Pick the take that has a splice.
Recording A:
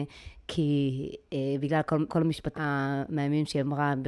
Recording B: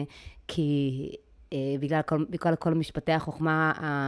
A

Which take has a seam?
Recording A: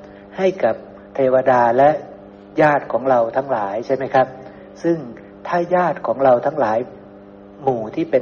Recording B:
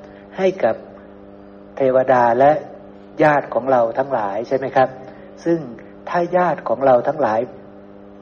A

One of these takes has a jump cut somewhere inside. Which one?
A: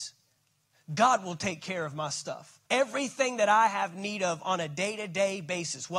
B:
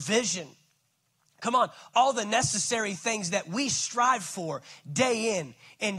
A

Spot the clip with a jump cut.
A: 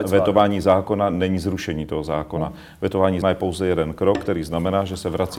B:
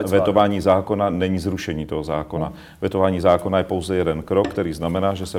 A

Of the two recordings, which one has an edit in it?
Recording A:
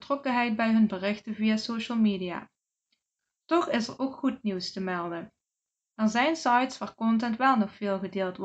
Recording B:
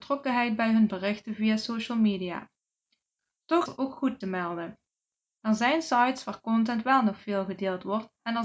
B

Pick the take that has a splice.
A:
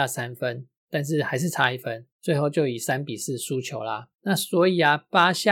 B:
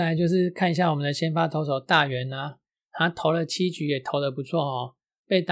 A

